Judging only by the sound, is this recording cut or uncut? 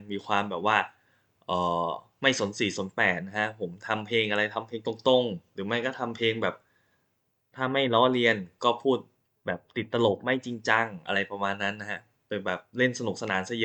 uncut